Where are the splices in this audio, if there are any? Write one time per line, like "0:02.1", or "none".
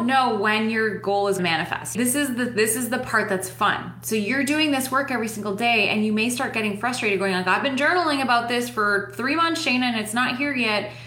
0:01.4